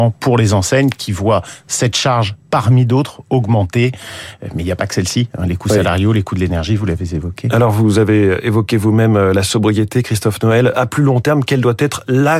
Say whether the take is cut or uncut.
uncut